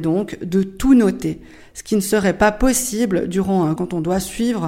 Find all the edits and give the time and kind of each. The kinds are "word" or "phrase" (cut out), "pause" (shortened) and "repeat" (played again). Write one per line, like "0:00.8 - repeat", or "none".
0:03.8 - word